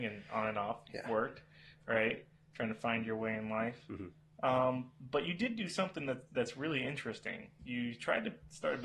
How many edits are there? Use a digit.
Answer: 1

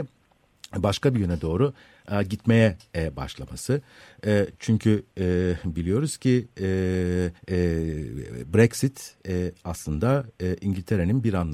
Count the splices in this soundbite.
1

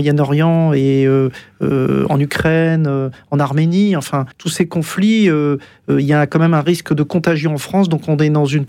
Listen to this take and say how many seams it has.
1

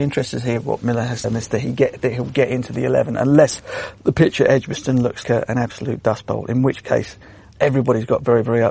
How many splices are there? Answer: 3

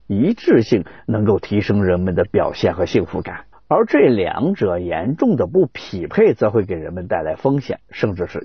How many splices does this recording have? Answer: 1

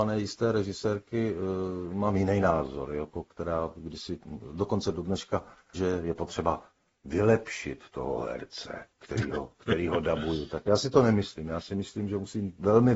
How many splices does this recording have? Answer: 2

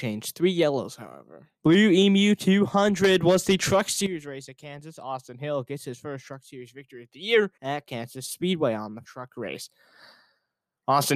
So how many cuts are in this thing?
3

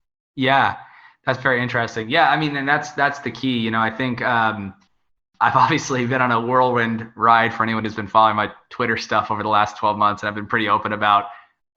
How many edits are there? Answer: 0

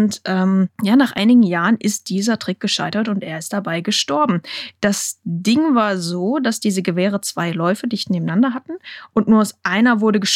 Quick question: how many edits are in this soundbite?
0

